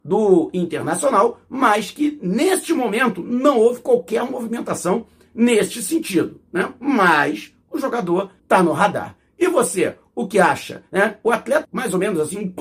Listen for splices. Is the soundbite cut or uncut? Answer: cut